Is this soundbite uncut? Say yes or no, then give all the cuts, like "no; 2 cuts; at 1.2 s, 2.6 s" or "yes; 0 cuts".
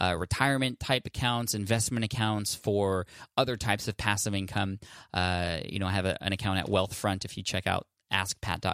yes; 0 cuts